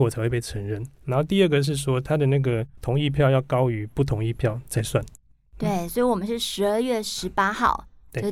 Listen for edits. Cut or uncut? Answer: uncut